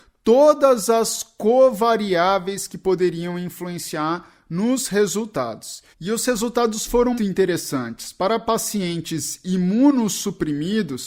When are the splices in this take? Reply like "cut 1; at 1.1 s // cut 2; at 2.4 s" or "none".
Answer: cut 1; at 5.9 s // cut 2; at 7.2 s